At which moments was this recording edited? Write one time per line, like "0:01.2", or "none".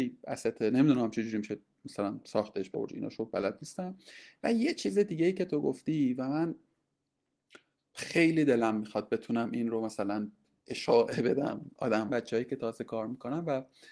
0:02.7
0:12.1